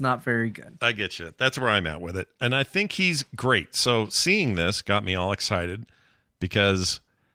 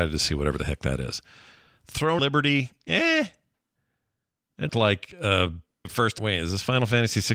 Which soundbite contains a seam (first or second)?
second